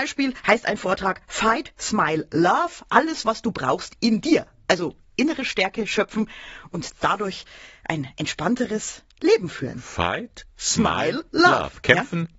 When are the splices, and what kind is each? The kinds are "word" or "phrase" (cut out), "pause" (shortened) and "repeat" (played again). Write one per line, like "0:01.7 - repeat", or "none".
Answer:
0:04.0 - word